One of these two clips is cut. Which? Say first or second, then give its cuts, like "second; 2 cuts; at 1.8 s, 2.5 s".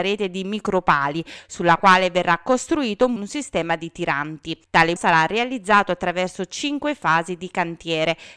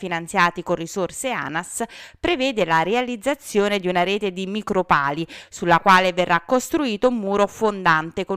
first; 2 cuts; at 3.2 s, 5.0 s